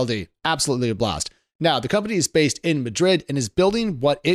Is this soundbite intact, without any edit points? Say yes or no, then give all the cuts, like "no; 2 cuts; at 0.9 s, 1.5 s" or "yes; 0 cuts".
yes; 0 cuts